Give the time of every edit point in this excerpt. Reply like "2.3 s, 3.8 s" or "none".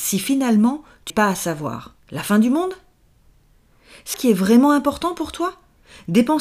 1.1 s, 2.0 s, 4.1 s